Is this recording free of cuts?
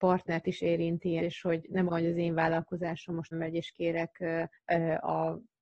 no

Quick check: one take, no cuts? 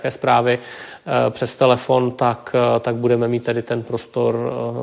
yes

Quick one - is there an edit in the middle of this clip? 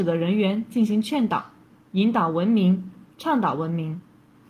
no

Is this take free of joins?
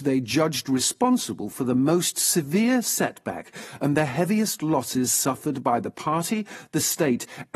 yes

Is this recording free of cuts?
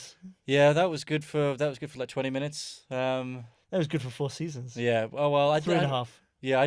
yes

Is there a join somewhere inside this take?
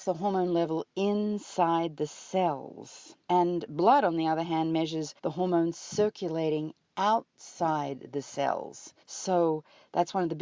yes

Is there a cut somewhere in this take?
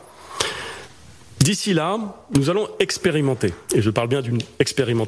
yes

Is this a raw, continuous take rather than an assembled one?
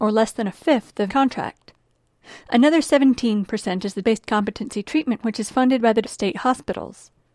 no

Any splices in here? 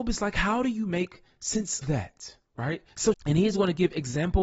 yes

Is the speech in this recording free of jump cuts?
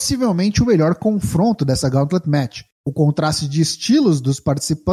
yes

